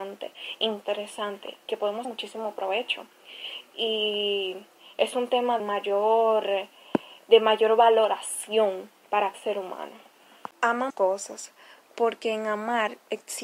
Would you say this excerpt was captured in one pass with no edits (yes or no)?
no